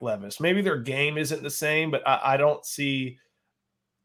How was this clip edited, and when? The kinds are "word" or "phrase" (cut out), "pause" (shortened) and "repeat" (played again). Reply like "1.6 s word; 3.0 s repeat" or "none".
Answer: none

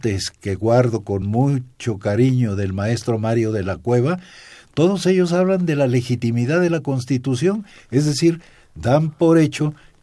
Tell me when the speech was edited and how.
none

